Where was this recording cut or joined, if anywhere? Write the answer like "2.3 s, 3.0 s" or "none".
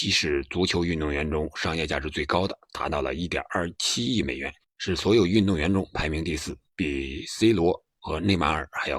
4.6 s, 6.7 s